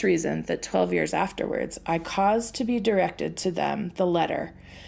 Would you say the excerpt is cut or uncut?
uncut